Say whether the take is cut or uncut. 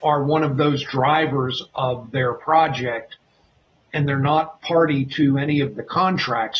uncut